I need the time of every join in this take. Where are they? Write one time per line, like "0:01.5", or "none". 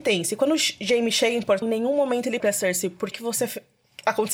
0:01.6
0:02.4
0:03.1